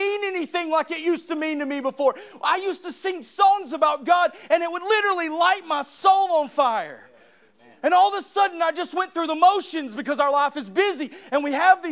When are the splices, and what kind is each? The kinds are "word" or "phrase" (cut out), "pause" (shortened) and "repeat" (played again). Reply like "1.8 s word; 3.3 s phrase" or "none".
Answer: none

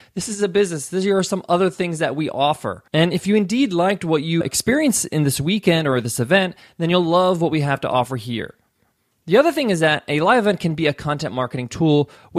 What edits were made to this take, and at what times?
2.9 s pause

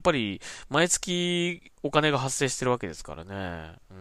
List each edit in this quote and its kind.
1.7 s word

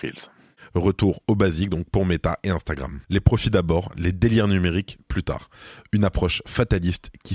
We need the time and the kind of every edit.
3.0 s pause

